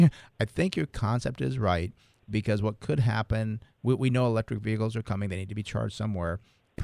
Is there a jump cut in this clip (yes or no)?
no